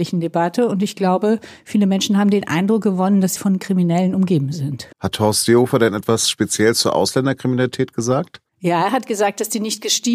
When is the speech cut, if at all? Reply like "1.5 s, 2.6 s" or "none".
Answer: 3.4 s, 4.9 s, 8.5 s